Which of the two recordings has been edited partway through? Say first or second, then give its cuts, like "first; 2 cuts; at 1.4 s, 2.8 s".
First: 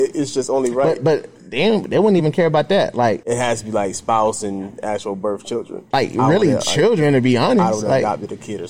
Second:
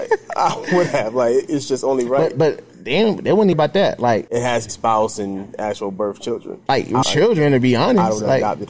second; 3 cuts; at 3.5 s, 4.7 s, 7.0 s